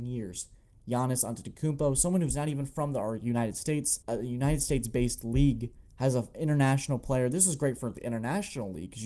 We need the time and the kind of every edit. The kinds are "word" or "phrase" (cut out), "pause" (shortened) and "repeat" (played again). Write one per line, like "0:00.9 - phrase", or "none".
0:04.0 - pause
0:05.9 - pause

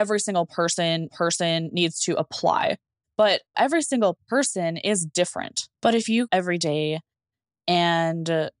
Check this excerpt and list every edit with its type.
0:01.1 - repeat
0:03.5 - word
0:05.7 - pause
0:06.3 - phrase

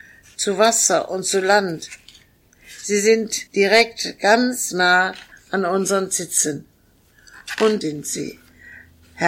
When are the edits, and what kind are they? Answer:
0:03.5 - pause
0:05.3 - pause
0:07.8 - word

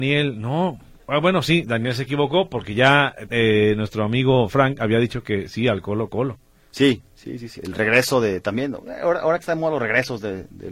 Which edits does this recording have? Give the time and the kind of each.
0:03.3 - word
0:07.6 - word

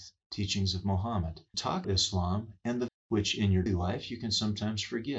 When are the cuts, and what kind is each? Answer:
0:01.5 - word
0:01.8 - word
0:02.9 - word
0:03.7 - word

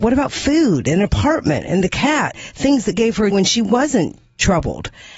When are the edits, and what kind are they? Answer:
0:02.3 - word
0:03.3 - word

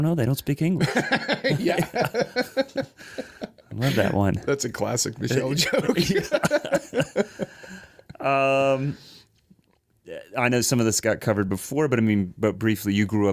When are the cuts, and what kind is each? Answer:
none

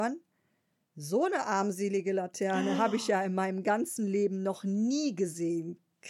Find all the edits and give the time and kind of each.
none

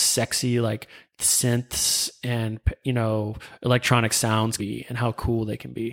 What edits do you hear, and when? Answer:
0:04.6 - word

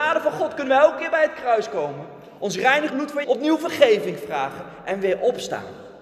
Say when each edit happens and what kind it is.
0:02.9 - phrase
0:03.2 - word

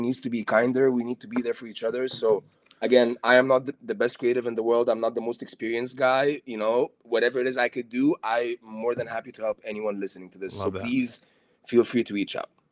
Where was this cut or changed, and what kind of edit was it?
none

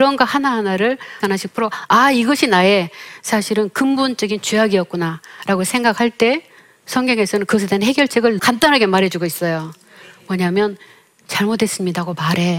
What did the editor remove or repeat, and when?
0:01.2 - word
0:08.4 - word

